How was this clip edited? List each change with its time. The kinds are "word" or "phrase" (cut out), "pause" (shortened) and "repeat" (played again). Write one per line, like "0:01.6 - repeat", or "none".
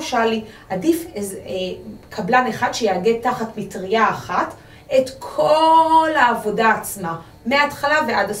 none